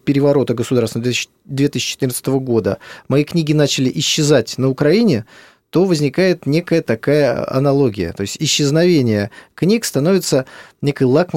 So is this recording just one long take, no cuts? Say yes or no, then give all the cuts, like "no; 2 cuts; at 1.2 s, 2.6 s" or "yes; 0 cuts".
yes; 0 cuts